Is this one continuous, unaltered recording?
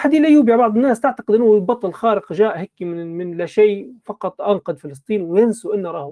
yes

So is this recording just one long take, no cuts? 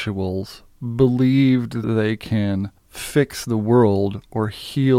no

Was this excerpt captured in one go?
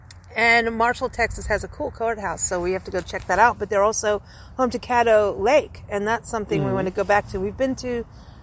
yes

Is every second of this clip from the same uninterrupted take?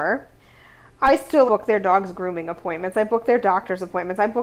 no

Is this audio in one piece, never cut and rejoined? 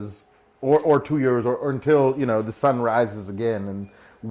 yes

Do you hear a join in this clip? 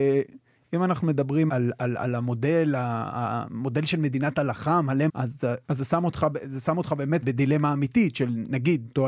yes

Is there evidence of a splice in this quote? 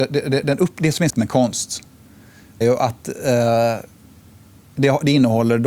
yes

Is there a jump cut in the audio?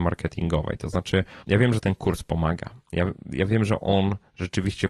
yes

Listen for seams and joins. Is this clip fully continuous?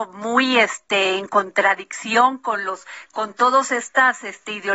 yes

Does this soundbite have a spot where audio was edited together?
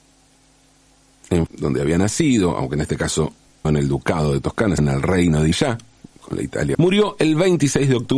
yes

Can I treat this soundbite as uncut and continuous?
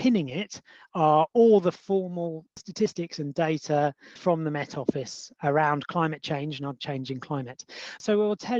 no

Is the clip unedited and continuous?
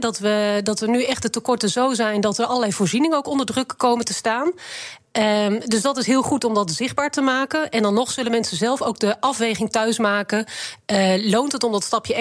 yes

